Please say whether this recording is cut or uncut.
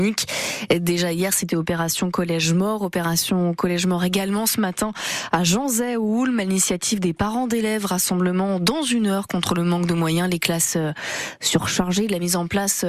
uncut